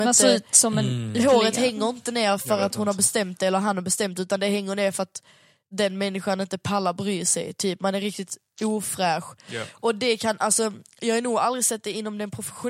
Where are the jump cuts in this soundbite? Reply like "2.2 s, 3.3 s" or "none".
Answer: none